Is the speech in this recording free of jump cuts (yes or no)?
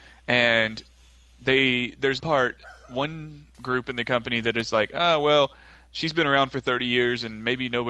no